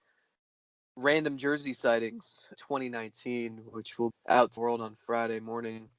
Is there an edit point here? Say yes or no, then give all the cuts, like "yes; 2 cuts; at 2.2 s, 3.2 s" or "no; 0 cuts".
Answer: yes; 3 cuts; at 2.6 s, 4.1 s, 4.6 s